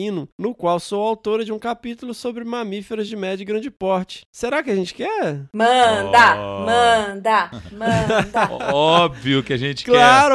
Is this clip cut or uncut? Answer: uncut